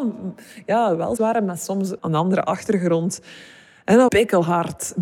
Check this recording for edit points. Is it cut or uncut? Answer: cut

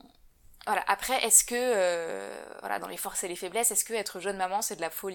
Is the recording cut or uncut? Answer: uncut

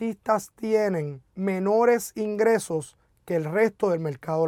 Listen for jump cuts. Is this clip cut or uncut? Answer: cut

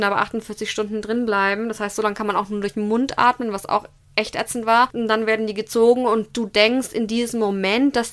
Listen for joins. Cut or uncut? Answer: uncut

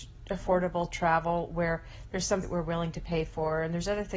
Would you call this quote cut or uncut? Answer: cut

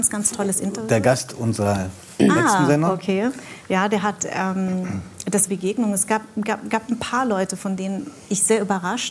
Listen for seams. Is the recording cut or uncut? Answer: cut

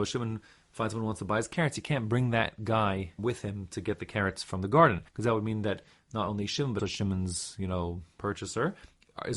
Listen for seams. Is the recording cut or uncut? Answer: cut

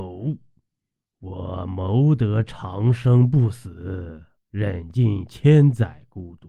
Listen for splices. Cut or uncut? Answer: cut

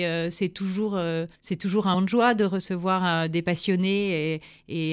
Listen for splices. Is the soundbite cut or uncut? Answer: cut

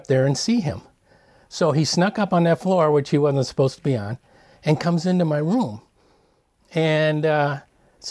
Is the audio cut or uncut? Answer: uncut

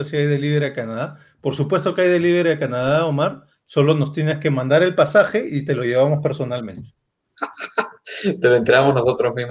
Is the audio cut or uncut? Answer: uncut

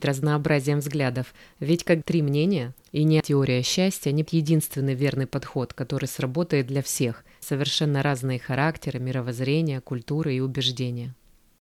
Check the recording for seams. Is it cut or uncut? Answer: cut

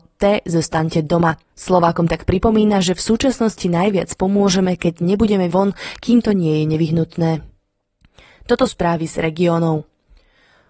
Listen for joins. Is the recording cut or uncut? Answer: cut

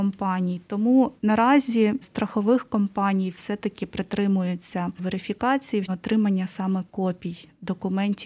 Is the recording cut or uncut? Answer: cut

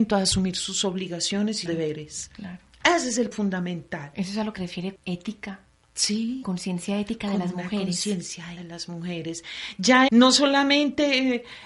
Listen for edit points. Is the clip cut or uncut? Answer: cut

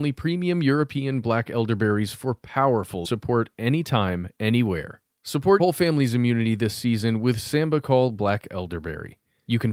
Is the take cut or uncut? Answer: cut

